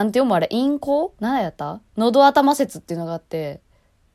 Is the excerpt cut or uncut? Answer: cut